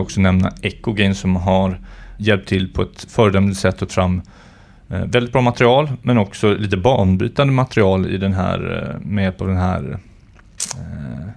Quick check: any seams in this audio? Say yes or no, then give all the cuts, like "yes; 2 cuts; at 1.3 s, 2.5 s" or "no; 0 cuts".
yes; 2 cuts; at 2.2 s, 3.9 s